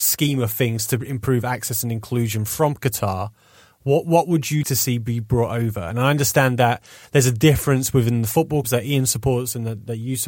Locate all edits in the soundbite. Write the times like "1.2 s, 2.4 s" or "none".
4.6 s, 8.6 s